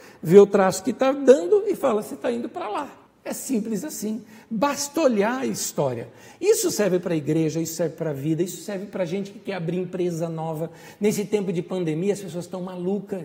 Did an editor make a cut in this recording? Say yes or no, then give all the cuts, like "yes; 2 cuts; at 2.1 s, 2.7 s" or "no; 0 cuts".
yes; 1 cut; at 3.1 s